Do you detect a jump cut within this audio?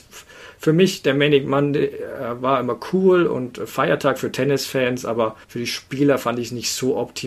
yes; 1 cut; at 5.4 s

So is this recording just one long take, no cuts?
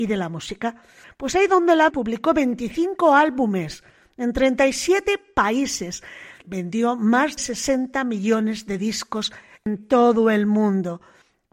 no; 3 cuts; at 1.9 s, 6.4 s, 7.4 s

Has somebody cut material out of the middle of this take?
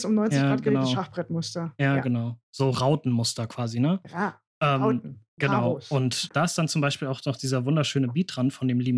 yes; 2 cuts; at 5.3 s, 6.3 s

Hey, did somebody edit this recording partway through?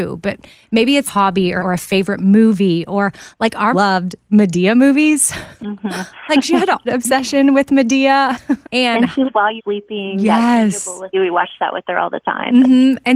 yes; 9 cuts; at 1.1 s, 1.6 s, 3.7 s, 5.6 s, 6.8 s, 8.6 s, 9.2 s, 9.6 s, 11.1 s

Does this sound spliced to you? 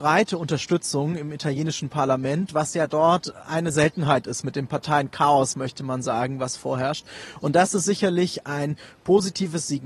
no; 0 cuts

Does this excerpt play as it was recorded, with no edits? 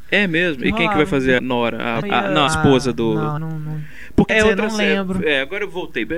no; 5 cuts; at 1.4 s, 2.0 s, 2.5 s, 3.4 s, 4.3 s

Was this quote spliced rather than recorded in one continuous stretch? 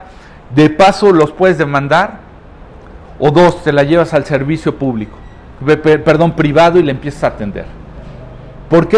no; 0 cuts

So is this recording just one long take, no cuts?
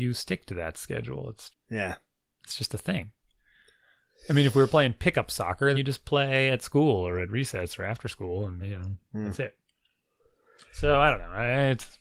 no; 3 cuts; at 1.5 s, 5.7 s, 8.6 s

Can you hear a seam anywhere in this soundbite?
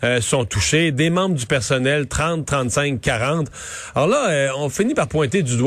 no; 0 cuts

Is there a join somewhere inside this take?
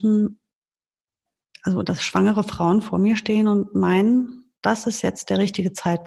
no; 0 cuts

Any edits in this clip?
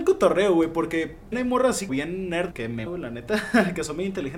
yes; 4 cuts; at 1.3 s, 1.9 s, 2.5 s, 2.9 s

